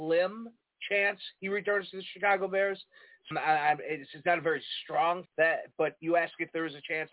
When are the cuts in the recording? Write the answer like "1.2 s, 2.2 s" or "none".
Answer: 3.3 s, 5.3 s